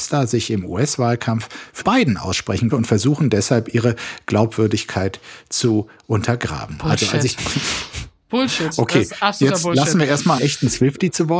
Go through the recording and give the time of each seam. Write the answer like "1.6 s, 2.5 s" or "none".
1.8 s, 2.7 s, 7.4 s, 10.4 s

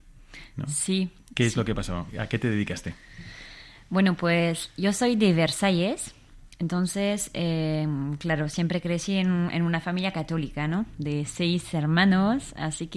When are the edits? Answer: none

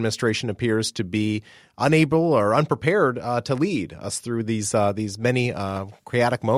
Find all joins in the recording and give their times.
none

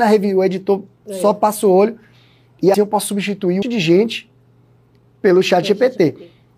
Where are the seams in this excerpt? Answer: 2.7 s, 3.6 s

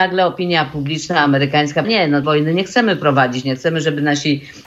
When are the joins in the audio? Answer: 1.8 s, 2.2 s

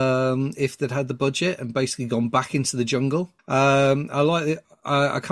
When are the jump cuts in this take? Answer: 3.4 s

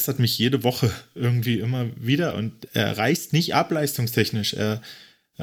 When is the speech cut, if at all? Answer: 2.7 s

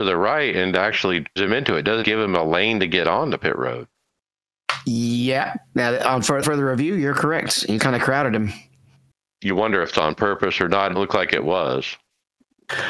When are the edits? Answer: 1.4 s, 2.0 s, 6.4 s, 7.8 s, 9.9 s, 10.9 s

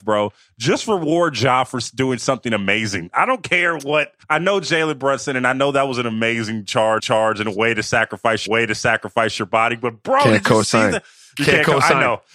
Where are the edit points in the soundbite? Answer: 4.2 s, 7.0 s, 8.5 s

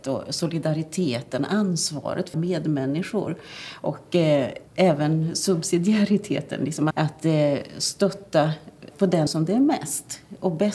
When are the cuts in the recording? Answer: 2.3 s, 4.7 s, 6.9 s, 8.9 s, 9.3 s

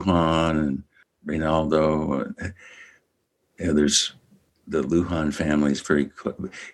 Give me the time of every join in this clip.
none

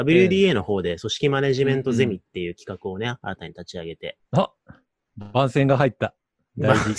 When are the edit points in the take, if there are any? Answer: 3.2 s, 4.3 s

